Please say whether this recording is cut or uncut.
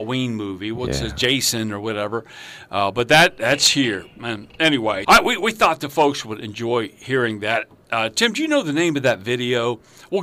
cut